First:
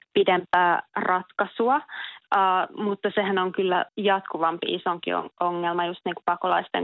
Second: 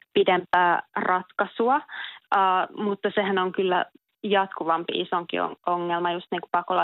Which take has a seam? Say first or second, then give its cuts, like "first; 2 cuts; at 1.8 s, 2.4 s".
first; 1 cut; at 3.9 s